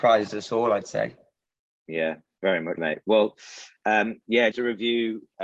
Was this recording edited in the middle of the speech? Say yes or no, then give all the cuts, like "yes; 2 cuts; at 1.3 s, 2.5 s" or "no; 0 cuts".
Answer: yes; 2 cuts; at 2.8 s, 4.5 s